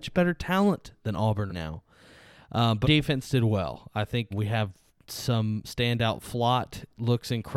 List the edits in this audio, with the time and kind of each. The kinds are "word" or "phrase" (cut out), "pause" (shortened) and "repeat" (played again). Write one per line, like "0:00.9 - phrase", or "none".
0:01.5 - word
0:02.8 - word
0:04.3 - word
0:05.6 - word